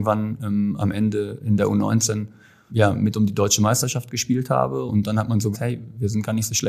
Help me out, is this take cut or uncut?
cut